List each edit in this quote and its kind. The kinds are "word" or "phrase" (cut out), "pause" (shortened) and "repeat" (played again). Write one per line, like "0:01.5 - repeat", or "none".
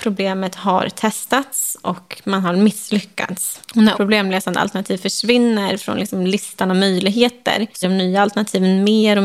0:03.9 - word
0:07.8 - word